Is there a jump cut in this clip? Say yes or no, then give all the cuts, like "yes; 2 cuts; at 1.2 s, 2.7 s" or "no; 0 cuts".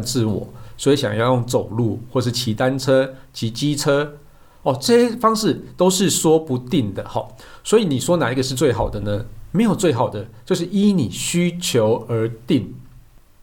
no; 0 cuts